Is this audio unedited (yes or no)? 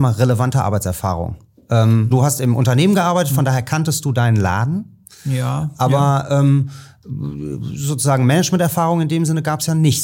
no